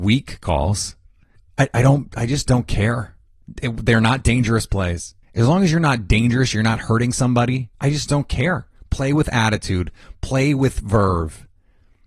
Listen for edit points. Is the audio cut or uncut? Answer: cut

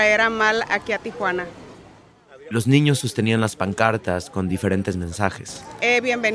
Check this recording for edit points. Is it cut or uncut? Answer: uncut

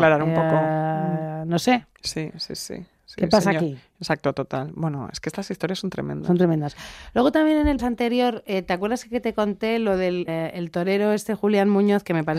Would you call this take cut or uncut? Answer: cut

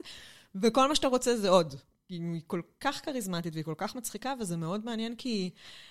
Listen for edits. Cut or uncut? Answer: uncut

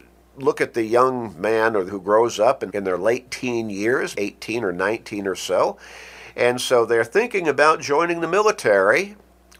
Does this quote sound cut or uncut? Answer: cut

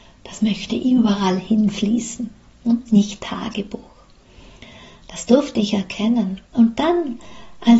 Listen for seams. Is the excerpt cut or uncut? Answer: cut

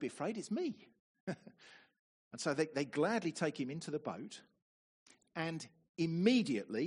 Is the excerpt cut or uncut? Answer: uncut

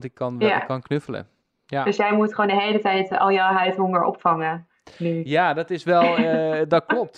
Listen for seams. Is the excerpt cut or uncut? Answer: uncut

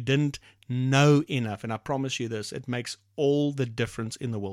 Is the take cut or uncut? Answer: uncut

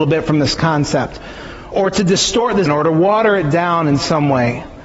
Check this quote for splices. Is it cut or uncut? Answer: cut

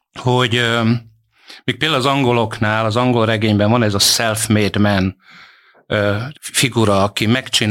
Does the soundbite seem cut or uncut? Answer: cut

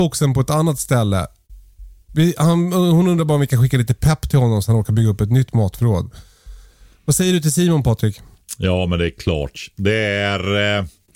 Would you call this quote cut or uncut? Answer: uncut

